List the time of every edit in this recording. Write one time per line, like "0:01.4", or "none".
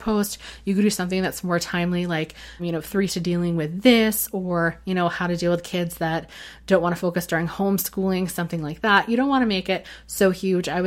0:02.6
0:03.1